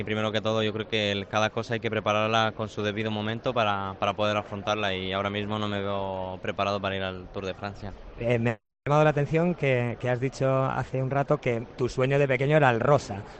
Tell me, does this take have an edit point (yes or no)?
no